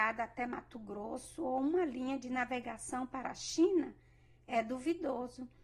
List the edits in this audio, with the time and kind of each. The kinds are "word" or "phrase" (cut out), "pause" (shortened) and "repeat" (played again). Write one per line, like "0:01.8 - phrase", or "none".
none

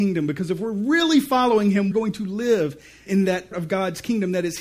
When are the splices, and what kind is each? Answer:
0:01.9 - word
0:03.1 - word
0:03.5 - word

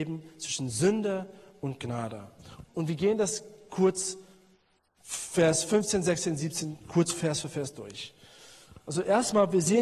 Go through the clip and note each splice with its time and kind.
none

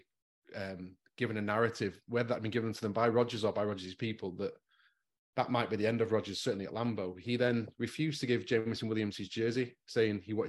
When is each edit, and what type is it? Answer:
none

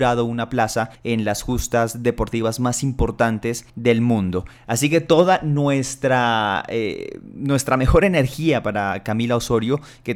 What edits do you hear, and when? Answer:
0:01.0 - pause
0:03.7 - pause

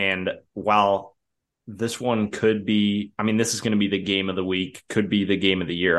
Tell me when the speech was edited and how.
none

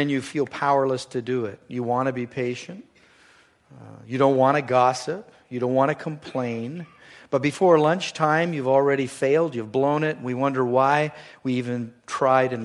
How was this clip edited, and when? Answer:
none

